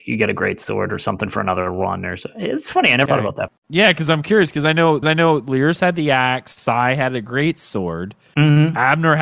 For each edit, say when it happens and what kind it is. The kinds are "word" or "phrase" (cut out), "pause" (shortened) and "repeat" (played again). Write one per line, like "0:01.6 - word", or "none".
0:03.1 - word
0:03.6 - pause
0:05.0 - repeat